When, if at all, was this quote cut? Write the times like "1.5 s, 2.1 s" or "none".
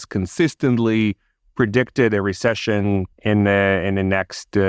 3.1 s